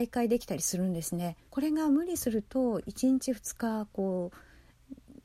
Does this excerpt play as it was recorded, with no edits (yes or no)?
no